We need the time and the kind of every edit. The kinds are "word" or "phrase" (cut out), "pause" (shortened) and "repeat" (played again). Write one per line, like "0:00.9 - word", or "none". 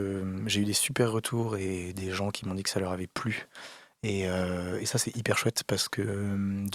none